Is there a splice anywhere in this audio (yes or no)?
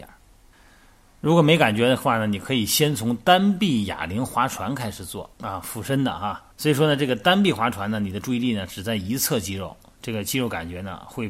yes